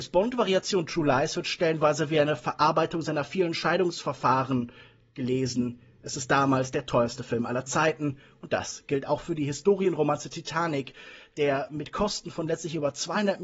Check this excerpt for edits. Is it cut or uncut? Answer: uncut